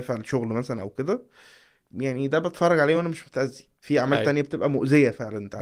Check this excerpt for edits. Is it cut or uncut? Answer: uncut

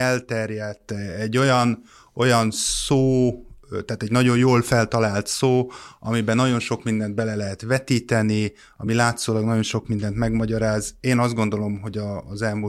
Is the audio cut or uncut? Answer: uncut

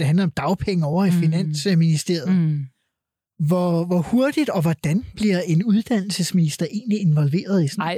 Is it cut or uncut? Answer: uncut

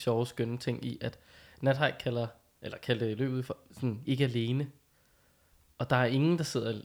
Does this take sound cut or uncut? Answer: cut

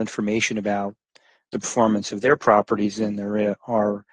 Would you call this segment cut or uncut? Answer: uncut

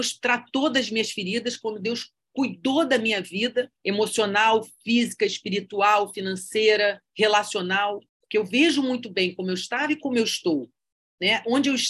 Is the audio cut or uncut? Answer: cut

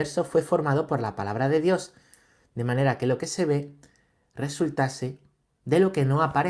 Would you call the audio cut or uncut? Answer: uncut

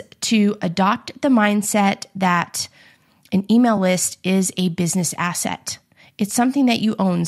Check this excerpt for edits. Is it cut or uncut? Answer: uncut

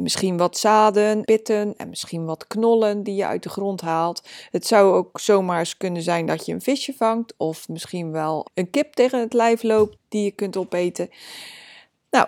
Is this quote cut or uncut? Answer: cut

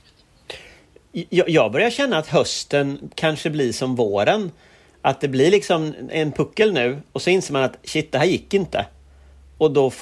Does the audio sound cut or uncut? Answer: uncut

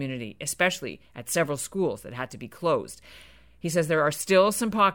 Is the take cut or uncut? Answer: uncut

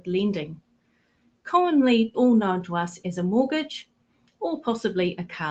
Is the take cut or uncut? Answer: cut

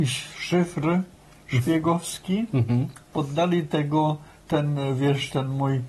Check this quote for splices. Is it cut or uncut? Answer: uncut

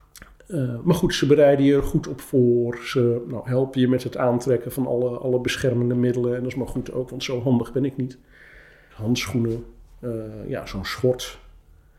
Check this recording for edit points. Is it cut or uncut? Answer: uncut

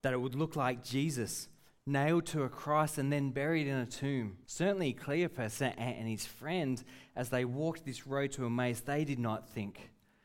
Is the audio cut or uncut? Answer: cut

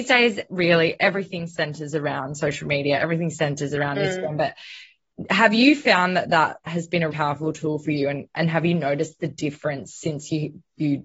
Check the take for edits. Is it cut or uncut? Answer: cut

